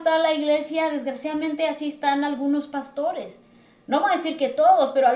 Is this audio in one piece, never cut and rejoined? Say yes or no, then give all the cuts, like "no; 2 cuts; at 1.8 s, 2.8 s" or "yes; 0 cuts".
yes; 0 cuts